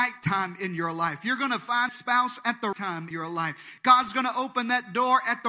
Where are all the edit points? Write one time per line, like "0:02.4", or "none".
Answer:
0:01.9
0:02.7
0:03.1